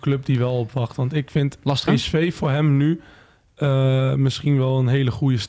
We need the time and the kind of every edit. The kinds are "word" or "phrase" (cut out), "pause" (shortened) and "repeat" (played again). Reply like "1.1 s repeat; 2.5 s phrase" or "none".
1.9 s phrase